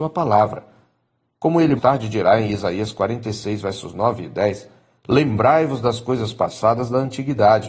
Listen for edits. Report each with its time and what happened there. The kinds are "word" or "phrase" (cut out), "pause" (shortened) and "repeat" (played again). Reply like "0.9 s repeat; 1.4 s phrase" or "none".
1.8 s word